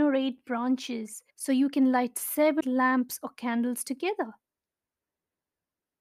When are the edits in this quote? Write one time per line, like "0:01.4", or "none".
0:01.3
0:02.6